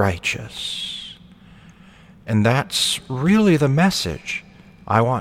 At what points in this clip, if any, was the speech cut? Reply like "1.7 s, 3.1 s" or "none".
none